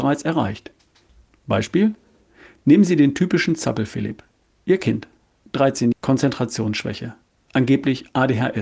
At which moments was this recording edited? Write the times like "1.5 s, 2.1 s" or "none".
5.9 s